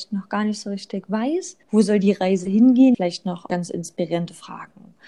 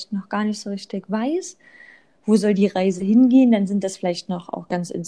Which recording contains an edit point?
first; 3 cuts; at 1.6 s, 2.9 s, 3.5 s

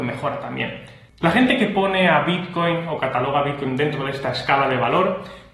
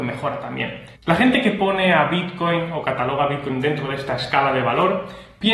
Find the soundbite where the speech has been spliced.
second; 1 cut; at 1.0 s

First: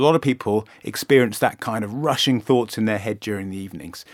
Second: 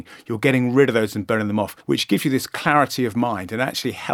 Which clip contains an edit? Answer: second; 1 cut; at 1.8 s

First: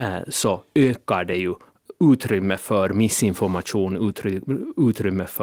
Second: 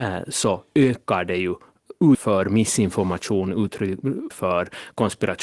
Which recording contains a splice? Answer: second; 2 cuts; at 2.1 s, 4.3 s

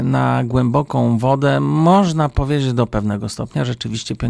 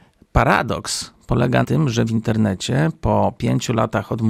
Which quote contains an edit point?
second; 2 cuts; at 1.6 s, 2.1 s

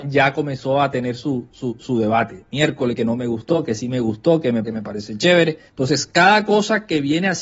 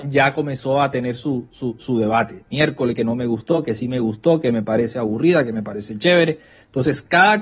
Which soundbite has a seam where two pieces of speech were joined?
first; 2 cuts; at 4.6 s, 5.7 s

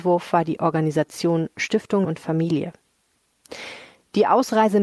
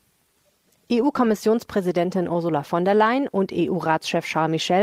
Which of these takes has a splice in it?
first; 1 cut; at 2.0 s

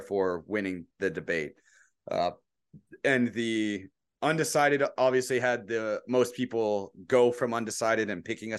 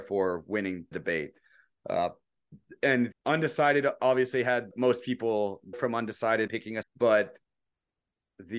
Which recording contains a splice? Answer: second; 6 cuts; at 0.9 s, 3.1 s, 4.7 s, 5.7 s, 6.5 s, 6.8 s

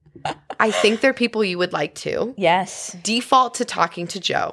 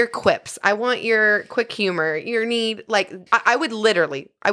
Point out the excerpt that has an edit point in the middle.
second; 1 cut; at 3.3 s

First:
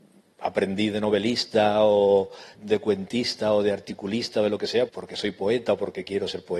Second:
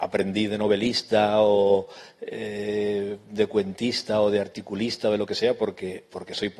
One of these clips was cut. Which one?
first; 2 cuts; at 2.5 s, 4.9 s

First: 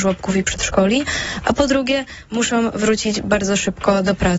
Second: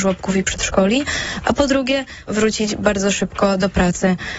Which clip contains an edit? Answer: second; 1 cut; at 2.3 s

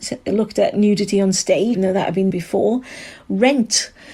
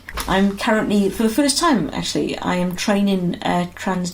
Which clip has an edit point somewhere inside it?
first; 2 cuts; at 1.7 s, 2.3 s

